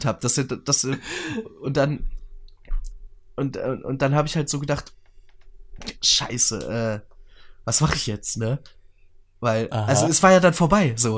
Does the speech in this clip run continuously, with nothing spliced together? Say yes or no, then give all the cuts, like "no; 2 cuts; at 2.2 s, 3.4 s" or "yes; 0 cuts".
yes; 0 cuts